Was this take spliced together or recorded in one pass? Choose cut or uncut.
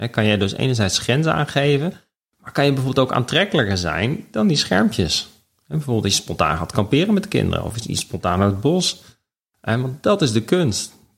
uncut